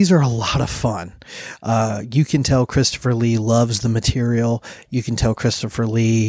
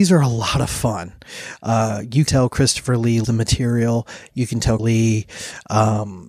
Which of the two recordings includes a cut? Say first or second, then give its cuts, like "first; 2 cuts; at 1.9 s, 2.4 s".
second; 3 cuts; at 2.3 s, 3.2 s, 4.8 s